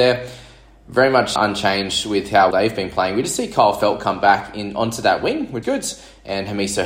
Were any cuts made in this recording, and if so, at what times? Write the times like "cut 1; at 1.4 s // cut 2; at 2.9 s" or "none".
cut 1; at 1.4 s // cut 2; at 2.5 s // cut 3; at 5.6 s